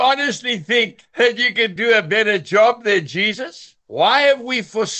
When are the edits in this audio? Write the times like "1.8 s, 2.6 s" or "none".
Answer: 3.8 s

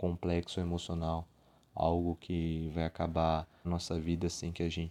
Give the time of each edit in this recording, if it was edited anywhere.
3.6 s

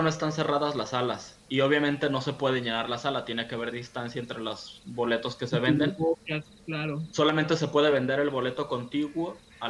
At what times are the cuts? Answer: none

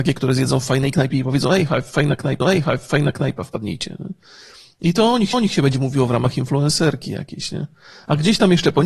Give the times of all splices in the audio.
2.4 s, 5.3 s

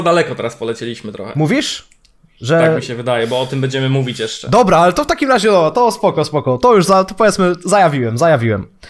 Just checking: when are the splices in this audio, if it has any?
none

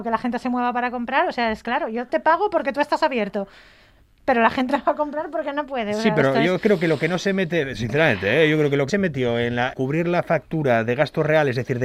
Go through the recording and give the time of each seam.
1.6 s, 2.1 s, 4.7 s, 8.9 s, 9.7 s

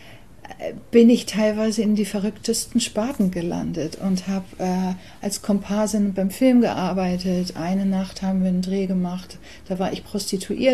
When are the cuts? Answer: none

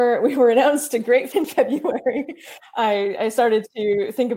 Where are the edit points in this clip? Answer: 1.3 s

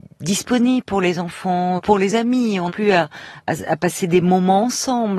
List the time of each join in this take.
1.8 s, 2.7 s

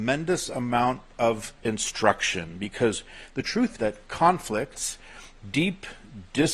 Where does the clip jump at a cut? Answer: 1.6 s, 3.7 s, 5.3 s

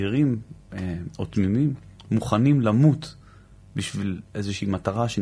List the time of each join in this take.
none

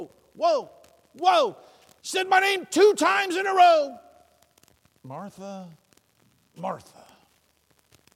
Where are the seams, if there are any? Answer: 2.0 s

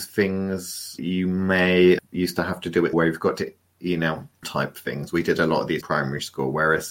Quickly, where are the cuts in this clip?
1.0 s, 2.0 s, 2.9 s, 4.4 s, 5.8 s

